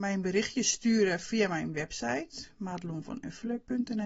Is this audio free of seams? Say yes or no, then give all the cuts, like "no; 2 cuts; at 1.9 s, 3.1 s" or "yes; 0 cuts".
yes; 0 cuts